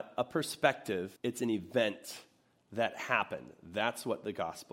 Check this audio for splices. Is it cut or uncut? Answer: cut